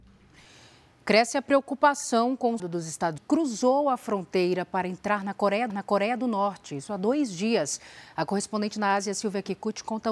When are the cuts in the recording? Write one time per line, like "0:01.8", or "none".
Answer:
0:02.6
0:03.2
0:05.7